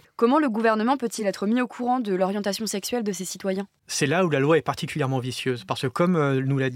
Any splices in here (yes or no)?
no